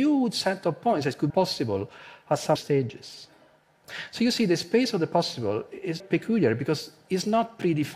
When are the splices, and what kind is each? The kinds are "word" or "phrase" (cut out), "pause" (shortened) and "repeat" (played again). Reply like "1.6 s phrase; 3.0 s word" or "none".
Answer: 1.3 s word; 2.6 s word; 6.0 s word

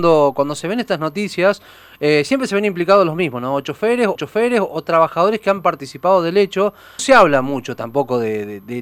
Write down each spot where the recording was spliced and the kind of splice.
4.1 s repeat; 7.0 s phrase

